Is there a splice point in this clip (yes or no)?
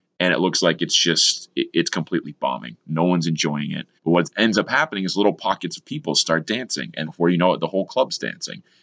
yes